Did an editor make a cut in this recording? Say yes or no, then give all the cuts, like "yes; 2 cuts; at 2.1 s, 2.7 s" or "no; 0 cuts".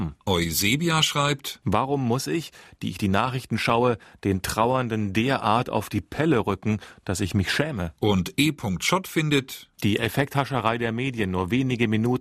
no; 0 cuts